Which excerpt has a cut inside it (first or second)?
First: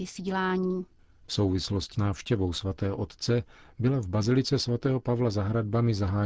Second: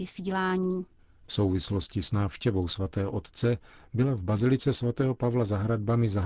first